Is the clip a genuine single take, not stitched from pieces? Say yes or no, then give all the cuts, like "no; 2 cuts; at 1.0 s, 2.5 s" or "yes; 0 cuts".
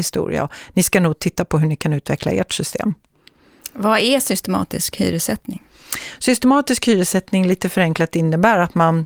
yes; 0 cuts